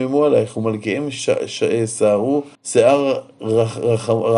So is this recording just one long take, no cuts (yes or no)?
no